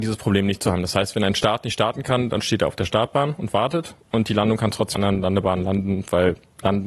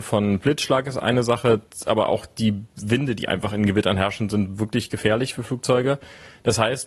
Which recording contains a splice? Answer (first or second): first